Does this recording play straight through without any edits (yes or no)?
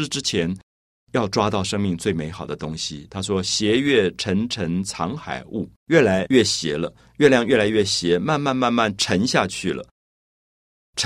no